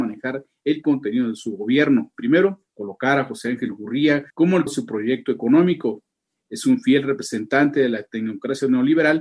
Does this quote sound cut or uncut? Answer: cut